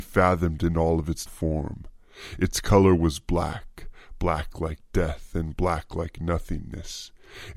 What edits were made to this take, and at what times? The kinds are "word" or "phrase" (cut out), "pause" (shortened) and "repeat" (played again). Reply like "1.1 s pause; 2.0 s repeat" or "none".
1.3 s word